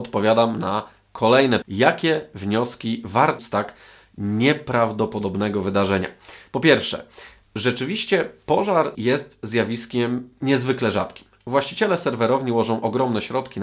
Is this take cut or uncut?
cut